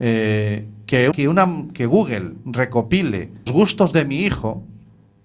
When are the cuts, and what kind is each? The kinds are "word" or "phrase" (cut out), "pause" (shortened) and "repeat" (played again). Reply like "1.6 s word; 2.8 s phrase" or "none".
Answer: 1.1 s word; 3.5 s word